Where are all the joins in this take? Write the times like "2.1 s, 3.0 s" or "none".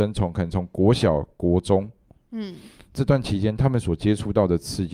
none